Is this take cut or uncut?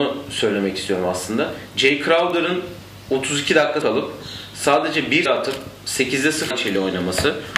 cut